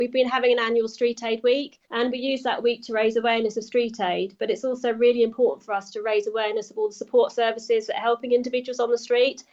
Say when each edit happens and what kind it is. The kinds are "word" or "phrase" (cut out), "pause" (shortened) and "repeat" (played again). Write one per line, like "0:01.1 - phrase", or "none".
0:01.8 - pause